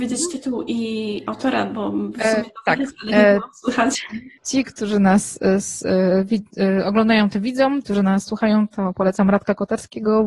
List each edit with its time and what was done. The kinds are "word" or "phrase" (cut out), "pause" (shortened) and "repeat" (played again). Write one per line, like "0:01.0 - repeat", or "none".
0:04.4 - pause
0:07.8 - word

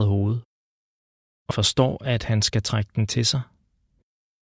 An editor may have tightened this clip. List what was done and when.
0:01.5 - word

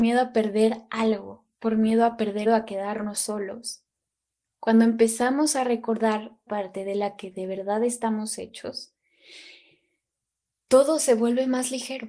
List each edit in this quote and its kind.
0:01.5 - pause
0:02.5 - phrase
0:06.5 - word

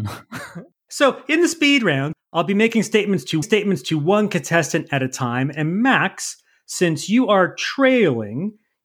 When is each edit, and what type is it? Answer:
0:03.4 - repeat

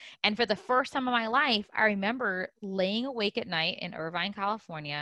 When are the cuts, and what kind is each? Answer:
none

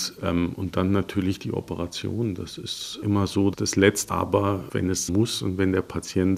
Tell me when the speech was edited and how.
0:03.0 - word
0:03.5 - word
0:04.1 - word
0:05.1 - word

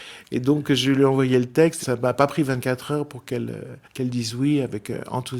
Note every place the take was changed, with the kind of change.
0:01.8 - word
0:03.8 - pause

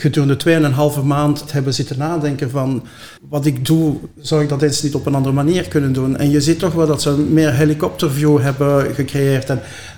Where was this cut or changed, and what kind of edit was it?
0:01.5 - word
0:03.2 - pause

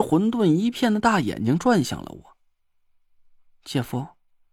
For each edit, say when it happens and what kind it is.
none

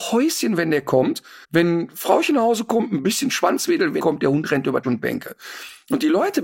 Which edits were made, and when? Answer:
0:01.4 - pause
0:04.0 - word
0:04.8 - word

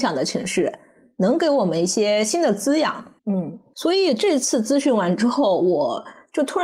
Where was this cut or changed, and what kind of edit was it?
0:03.2 - pause

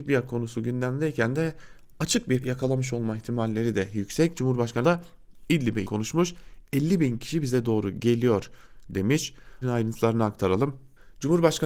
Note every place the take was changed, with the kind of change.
0:02.4 - word
0:04.8 - word
0:05.8 - word
0:09.6 - word

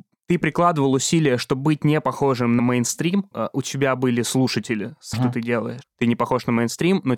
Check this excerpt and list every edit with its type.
0:02.6 - word
0:03.3 - phrase
0:05.1 - phrase

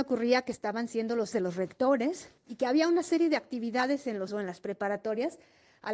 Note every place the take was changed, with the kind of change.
0:01.3 - word
0:02.4 - pause
0:04.3 - phrase

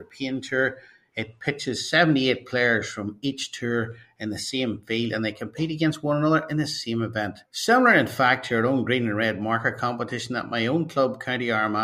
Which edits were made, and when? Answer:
0:07.4 - pause

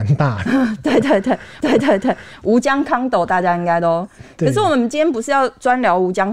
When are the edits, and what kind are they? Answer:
0:01.6 - repeat

